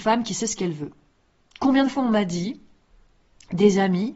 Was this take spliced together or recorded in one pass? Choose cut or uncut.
uncut